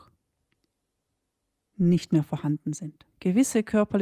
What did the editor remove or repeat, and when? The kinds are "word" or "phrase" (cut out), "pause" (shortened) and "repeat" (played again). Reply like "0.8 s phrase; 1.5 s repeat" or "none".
3.1 s pause